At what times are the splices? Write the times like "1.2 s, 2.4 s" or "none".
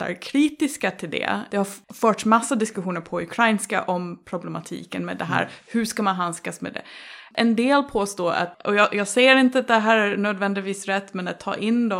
none